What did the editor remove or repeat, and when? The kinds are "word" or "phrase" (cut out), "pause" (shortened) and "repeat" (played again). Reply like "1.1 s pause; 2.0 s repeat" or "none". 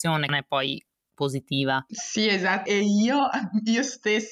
2.7 s word